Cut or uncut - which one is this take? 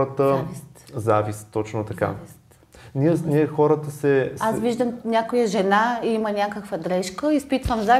uncut